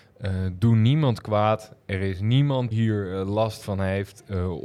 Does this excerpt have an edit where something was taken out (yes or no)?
yes